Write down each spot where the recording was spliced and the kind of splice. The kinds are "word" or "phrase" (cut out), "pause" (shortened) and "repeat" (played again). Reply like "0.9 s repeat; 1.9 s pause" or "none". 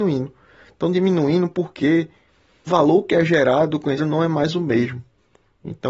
2.7 s word; 4.0 s word